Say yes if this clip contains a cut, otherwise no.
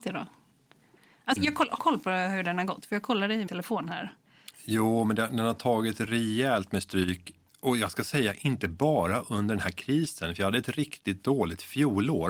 yes